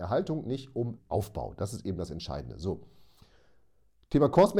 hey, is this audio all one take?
no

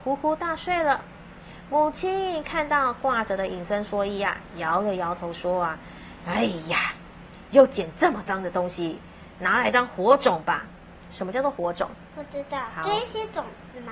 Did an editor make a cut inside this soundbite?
no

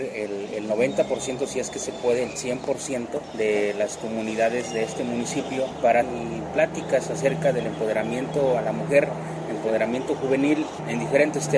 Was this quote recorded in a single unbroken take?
no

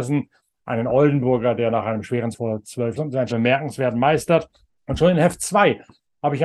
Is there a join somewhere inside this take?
yes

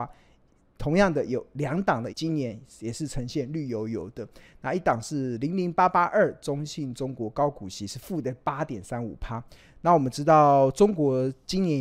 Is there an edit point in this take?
yes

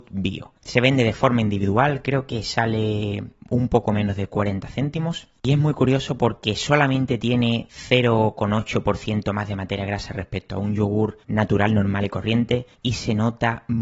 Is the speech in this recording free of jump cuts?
yes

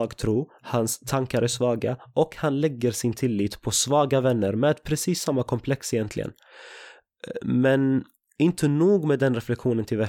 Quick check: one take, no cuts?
yes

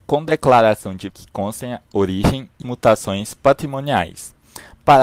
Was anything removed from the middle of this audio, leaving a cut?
yes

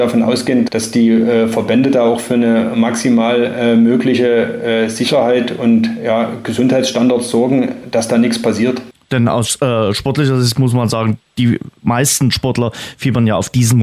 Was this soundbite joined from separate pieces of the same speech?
yes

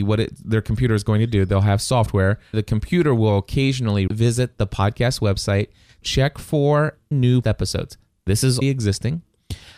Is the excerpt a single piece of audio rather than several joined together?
no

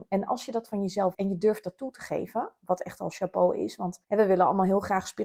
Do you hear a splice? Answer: yes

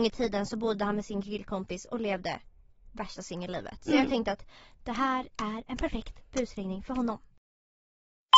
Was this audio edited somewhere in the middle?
no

